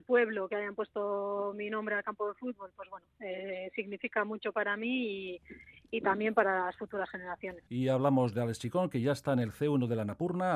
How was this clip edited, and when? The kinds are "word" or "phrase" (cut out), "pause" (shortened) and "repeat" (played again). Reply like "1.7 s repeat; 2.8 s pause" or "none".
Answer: 7.7 s pause